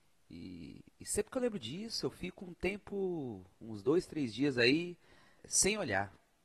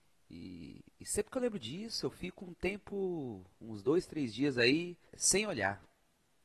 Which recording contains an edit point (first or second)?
second